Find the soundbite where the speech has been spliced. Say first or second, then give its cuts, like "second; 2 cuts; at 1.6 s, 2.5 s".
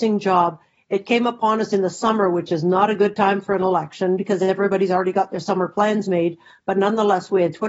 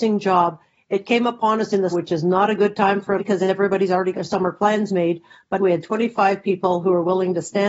second; 4 cuts; at 1.9 s, 3.2 s, 4.1 s, 5.6 s